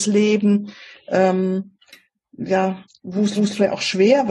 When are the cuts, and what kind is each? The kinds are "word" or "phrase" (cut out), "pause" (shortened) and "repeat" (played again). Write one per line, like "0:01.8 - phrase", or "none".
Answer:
0:03.4 - repeat